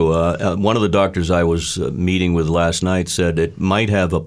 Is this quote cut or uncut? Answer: uncut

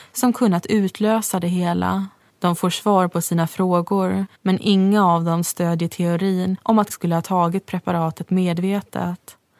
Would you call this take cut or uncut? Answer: cut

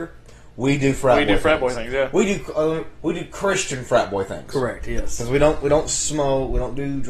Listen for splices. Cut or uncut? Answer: uncut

